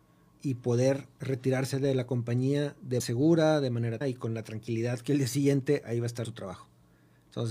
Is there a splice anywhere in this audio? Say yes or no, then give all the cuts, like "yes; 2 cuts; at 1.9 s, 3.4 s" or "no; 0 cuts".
yes; 3 cuts; at 3.0 s, 4.0 s, 6.2 s